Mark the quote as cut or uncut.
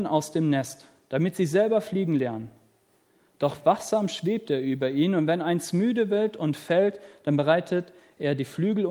uncut